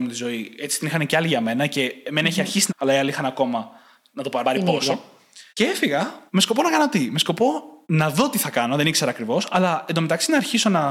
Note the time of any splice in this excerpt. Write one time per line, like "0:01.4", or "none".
0:02.7
0:04.4
0:05.5
0:06.3
0:07.8